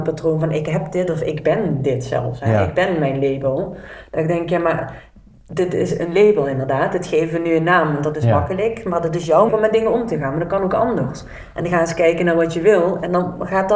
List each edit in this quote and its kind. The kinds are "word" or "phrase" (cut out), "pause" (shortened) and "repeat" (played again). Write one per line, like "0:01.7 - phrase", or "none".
0:09.5 - word